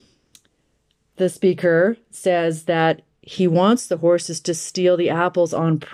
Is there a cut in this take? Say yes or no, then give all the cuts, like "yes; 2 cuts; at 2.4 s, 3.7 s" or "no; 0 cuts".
no; 0 cuts